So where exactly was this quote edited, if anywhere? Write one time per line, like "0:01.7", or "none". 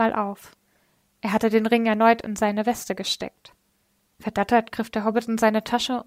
none